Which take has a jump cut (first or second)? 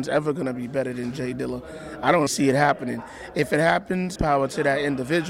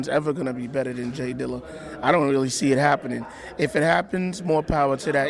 first